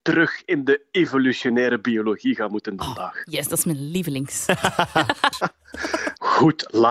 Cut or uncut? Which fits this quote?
cut